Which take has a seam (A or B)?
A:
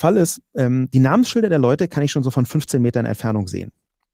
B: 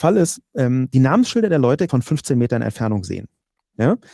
B